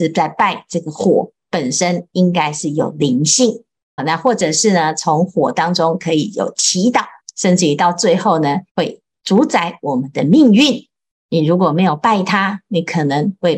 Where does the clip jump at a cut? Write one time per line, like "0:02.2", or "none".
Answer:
0:04.0
0:07.2
0:08.7